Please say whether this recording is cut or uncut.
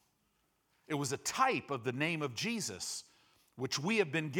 uncut